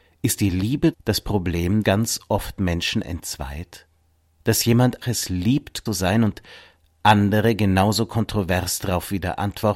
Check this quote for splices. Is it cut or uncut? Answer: cut